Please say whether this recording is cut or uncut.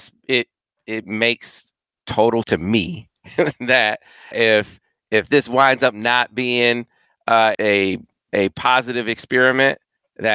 cut